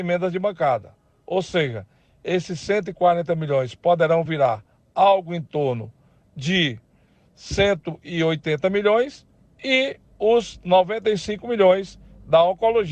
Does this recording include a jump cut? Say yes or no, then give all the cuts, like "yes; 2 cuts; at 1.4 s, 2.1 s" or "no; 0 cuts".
no; 0 cuts